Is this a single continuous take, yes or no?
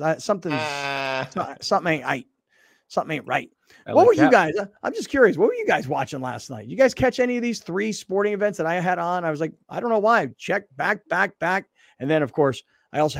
yes